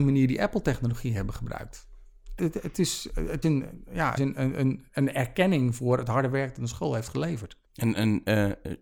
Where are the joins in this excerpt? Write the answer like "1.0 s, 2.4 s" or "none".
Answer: 2.4 s, 3.4 s, 4.2 s, 7.6 s